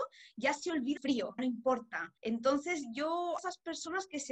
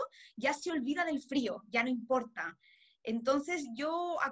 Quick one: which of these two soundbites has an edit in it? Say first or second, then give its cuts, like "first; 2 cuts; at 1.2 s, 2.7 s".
first; 4 cuts; at 1.0 s, 1.4 s, 2.2 s, 3.4 s